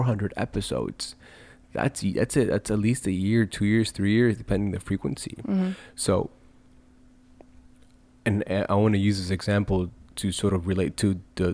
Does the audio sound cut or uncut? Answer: uncut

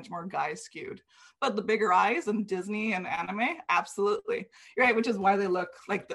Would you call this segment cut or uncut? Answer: uncut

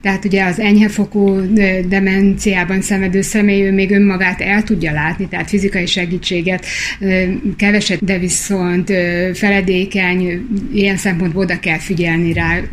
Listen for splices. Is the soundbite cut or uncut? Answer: cut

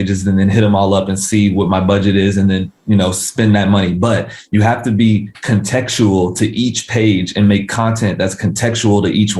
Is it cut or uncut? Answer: cut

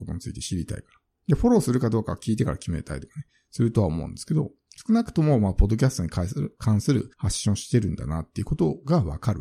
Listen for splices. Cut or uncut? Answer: cut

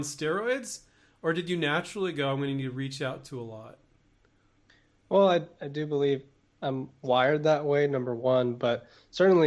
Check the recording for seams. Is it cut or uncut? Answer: uncut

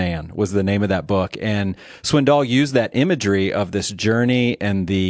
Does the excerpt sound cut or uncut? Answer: uncut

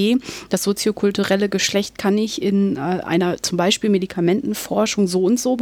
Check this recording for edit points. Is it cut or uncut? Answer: uncut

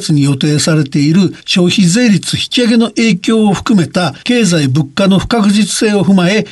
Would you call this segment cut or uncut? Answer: cut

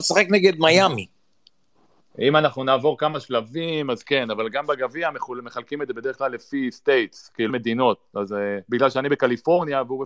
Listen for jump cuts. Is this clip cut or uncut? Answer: cut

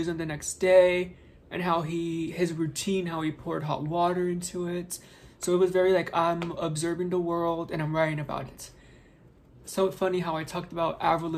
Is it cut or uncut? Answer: uncut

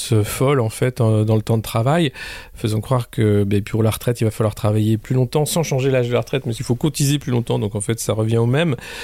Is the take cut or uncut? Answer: cut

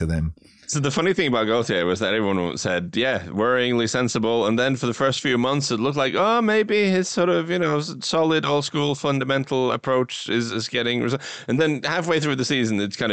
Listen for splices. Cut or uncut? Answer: uncut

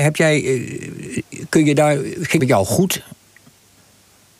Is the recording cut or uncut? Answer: cut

